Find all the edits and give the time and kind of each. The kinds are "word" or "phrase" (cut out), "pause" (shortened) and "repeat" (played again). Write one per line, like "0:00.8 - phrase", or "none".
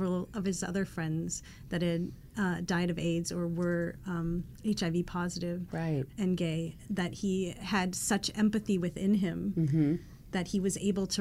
none